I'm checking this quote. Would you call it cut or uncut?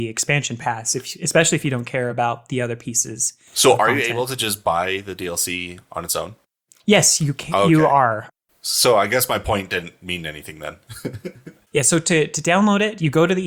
uncut